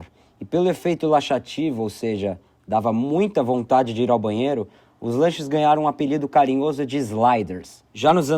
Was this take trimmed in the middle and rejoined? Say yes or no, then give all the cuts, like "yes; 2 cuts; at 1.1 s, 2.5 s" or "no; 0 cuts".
no; 0 cuts